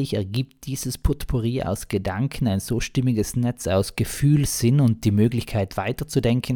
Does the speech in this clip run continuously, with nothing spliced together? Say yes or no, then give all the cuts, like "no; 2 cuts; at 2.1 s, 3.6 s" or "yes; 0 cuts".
yes; 0 cuts